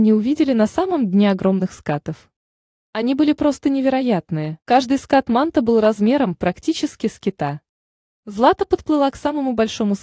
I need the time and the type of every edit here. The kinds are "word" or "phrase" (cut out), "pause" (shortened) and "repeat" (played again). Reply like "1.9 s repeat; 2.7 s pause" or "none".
4.6 s pause